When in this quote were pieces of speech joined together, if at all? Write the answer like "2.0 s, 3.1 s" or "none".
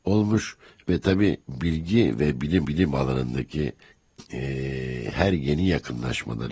1.4 s, 2.6 s